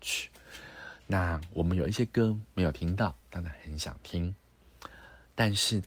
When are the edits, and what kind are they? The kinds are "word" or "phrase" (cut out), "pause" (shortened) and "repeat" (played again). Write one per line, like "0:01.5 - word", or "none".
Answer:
0:03.2 - pause